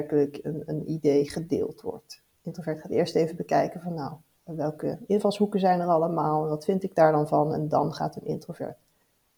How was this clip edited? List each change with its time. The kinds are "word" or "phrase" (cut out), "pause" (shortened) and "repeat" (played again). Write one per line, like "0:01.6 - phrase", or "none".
0:02.4 - pause

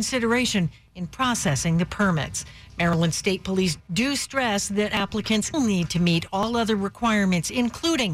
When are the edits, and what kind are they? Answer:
0:05.5 - word

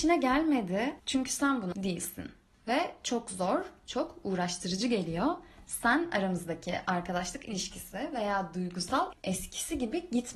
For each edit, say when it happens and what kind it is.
0:01.0 - pause
0:01.7 - word
0:09.1 - word

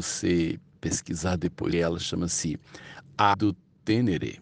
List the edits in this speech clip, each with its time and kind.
0:01.7 - word
0:03.3 - word

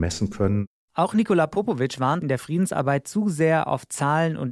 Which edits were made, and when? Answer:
0:02.2 - phrase

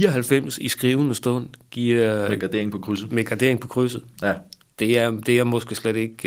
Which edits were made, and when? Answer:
none

